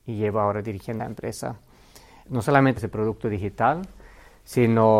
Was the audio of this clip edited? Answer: yes; 3 cuts; at 1.0 s, 2.2 s, 2.8 s

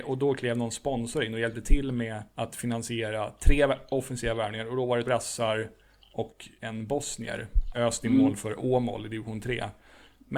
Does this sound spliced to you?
yes; 3 cuts; at 2.3 s, 5.1 s, 7.7 s

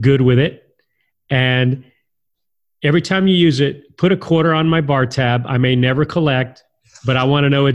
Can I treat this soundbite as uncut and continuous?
yes; 0 cuts

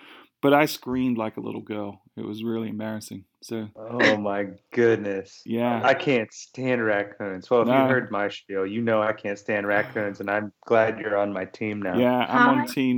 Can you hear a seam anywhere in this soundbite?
no; 0 cuts

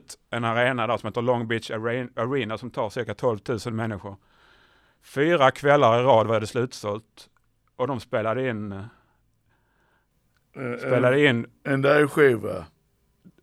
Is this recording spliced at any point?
no; 0 cuts

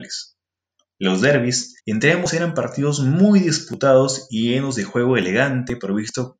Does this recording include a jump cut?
yes; 1 cut; at 1.8 s

